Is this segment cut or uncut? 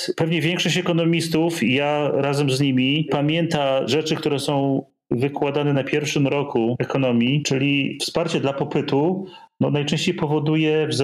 uncut